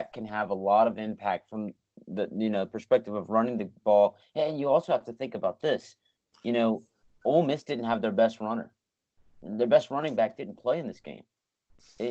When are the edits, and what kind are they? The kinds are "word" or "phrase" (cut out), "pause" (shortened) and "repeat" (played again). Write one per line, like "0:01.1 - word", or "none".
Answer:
none